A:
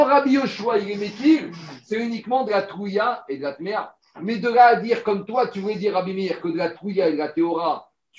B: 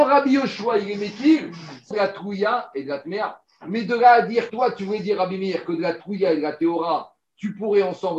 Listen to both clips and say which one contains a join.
B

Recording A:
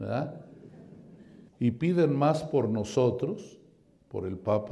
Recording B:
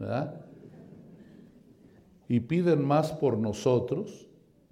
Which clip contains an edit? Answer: A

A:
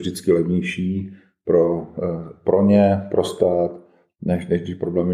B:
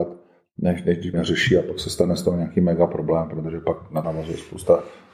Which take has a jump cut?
B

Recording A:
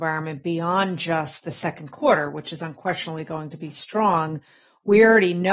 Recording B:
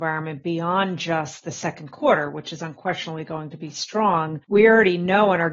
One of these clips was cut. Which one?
B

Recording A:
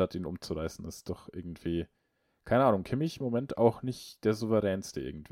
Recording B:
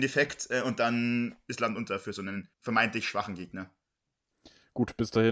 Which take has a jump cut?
B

